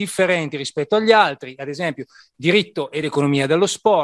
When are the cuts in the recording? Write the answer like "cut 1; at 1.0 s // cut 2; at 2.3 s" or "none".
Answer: none